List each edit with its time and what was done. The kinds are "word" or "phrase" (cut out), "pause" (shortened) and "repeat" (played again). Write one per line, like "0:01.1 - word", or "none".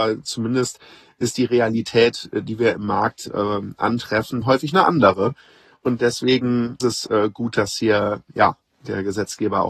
0:04.4 - word
0:06.8 - word